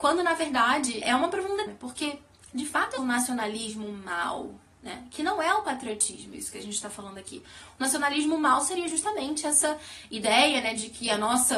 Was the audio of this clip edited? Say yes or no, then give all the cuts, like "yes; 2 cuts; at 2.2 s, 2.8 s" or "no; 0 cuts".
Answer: yes; 3 cuts; at 1.0 s, 1.7 s, 3.0 s